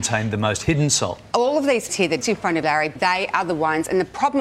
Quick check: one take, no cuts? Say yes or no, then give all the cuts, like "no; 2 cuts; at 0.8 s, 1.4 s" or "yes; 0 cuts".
no; 4 cuts; at 1.9 s, 2.2 s, 2.6 s, 3.0 s